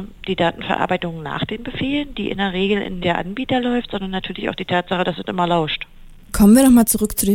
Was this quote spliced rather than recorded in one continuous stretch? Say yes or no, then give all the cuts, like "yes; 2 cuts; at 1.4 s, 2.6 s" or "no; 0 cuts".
yes; 1 cut; at 3.0 s